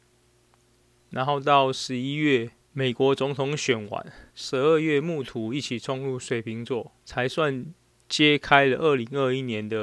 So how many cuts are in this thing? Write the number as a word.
three